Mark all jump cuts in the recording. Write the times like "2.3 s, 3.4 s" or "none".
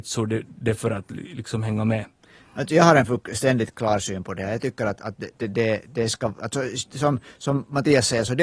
none

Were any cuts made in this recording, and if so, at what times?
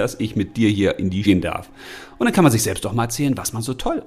1.2 s

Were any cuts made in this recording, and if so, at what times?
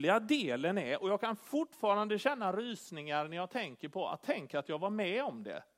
none

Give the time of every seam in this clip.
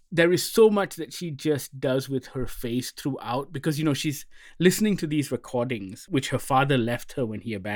none

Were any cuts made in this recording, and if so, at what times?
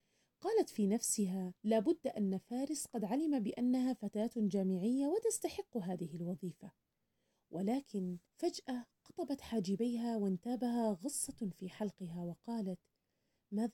1.6 s, 8.3 s

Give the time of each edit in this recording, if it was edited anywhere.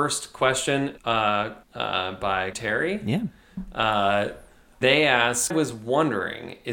1.0 s, 1.6 s, 2.5 s, 4.8 s, 5.5 s

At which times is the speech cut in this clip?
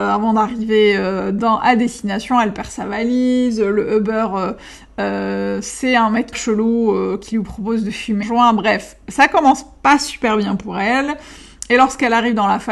6.3 s, 8.2 s

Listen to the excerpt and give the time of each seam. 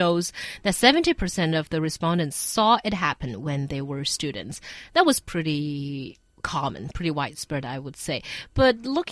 none

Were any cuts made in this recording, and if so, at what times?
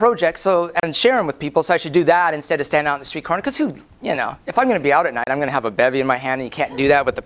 none

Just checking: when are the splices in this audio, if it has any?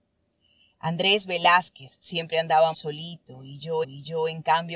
2.7 s, 3.8 s

